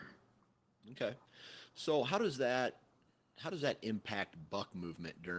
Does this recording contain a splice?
no; 0 cuts

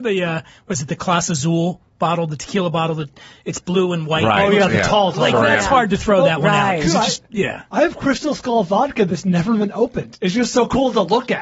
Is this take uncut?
yes; 0 cuts

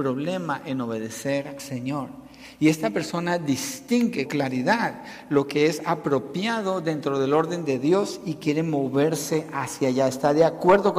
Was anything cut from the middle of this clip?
yes; 2 cuts; at 1.6 s, 4.3 s

